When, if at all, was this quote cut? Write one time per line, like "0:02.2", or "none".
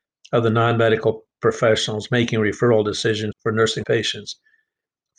0:03.3
0:03.8